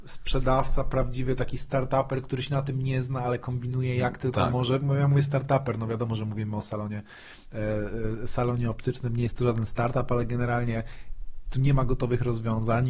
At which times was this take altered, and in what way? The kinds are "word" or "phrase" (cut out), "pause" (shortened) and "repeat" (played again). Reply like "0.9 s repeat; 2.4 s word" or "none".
none